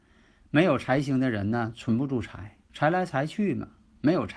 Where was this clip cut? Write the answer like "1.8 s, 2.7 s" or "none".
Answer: 2.6 s